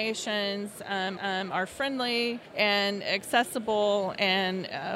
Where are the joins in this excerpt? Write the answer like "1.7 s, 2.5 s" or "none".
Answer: 1.2 s, 2.5 s